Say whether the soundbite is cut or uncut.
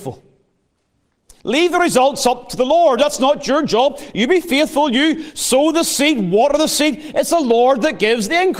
uncut